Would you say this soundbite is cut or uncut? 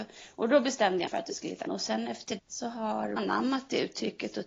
cut